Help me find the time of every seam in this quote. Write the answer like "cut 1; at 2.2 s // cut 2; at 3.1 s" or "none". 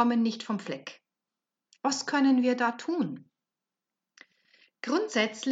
none